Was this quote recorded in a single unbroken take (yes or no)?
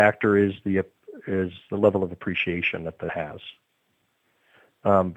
no